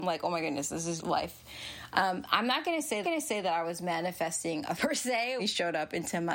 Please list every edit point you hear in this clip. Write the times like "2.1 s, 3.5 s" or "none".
1.0 s, 3.0 s, 4.8 s, 5.4 s